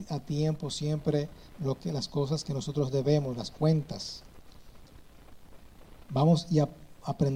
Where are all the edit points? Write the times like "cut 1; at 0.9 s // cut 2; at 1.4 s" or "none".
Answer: none

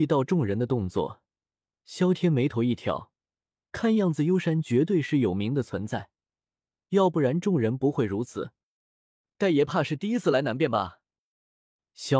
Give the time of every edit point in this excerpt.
none

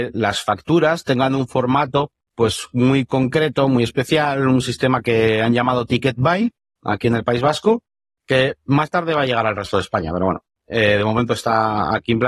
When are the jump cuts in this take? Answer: none

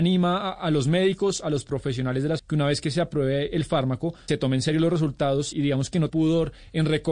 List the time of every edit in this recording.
cut 1; at 2.4 s // cut 2; at 4.3 s // cut 3; at 5.5 s // cut 4; at 6.1 s

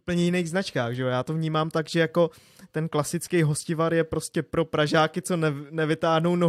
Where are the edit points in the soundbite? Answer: none

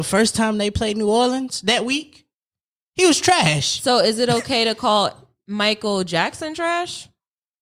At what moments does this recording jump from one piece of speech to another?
none

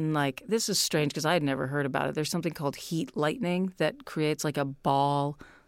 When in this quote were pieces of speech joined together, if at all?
none

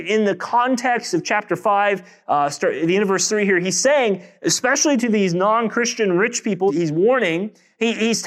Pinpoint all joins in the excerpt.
cut 1; at 6.7 s

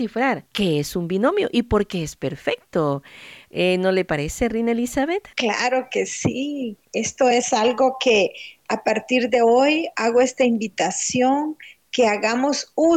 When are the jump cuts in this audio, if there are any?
none

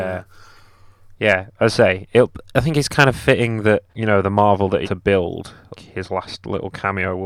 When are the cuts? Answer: cut 1; at 3.9 s // cut 2; at 4.8 s // cut 3; at 5.7 s

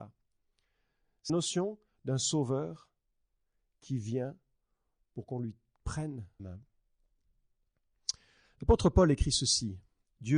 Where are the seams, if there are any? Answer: cut 1; at 1.3 s // cut 2; at 6.4 s

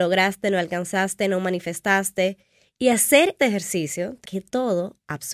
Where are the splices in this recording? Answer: cut 1; at 3.4 s // cut 2; at 4.2 s

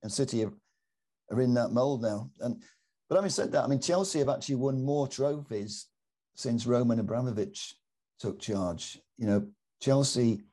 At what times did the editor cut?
none

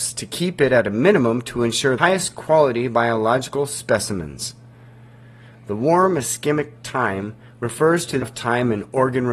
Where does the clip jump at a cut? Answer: cut 1; at 2.0 s // cut 2; at 8.2 s

